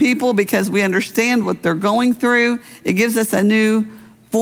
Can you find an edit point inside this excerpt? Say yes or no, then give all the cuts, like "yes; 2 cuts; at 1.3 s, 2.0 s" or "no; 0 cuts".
no; 0 cuts